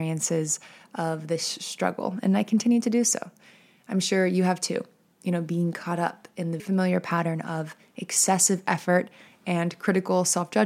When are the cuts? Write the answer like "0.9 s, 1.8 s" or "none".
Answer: 6.6 s